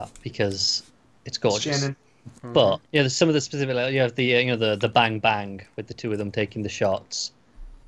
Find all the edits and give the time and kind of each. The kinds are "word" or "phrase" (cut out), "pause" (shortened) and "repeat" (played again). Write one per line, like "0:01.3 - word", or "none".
0:02.9 - pause